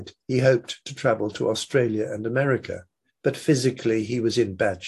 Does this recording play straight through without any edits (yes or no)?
no